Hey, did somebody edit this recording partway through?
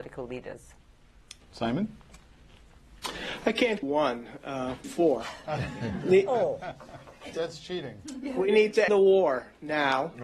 yes; 4 cuts; at 3.8 s, 4.8 s, 7.3 s, 8.9 s

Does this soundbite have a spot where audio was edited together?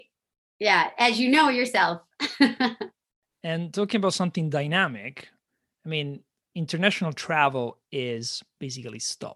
no; 0 cuts

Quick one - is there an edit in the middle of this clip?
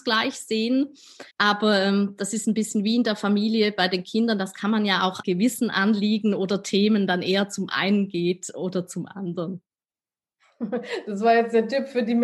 yes; 2 cuts; at 1.3 s, 5.2 s

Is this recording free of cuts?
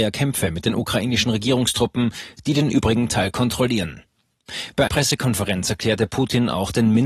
no; 1 cut; at 4.9 s

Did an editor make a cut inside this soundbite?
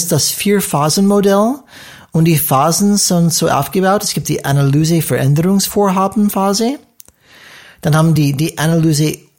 no; 0 cuts

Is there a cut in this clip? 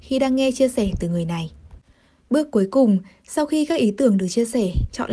no; 0 cuts

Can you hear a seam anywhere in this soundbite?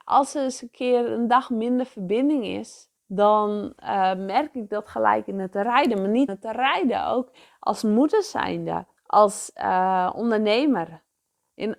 yes; 3 cuts; at 3.0 s, 6.3 s, 9.0 s

